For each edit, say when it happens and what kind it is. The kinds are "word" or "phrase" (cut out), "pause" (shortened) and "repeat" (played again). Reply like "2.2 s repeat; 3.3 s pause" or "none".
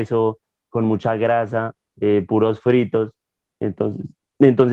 none